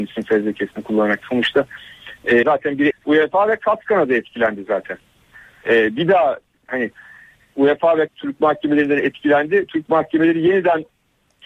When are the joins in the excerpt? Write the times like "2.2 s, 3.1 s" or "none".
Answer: 2.4 s, 2.9 s, 6.7 s, 8.1 s